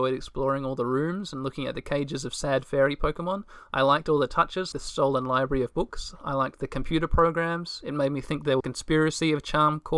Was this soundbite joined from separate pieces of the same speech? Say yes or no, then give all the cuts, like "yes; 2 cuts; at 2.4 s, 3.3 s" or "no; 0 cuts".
yes; 2 cuts; at 4.7 s, 8.6 s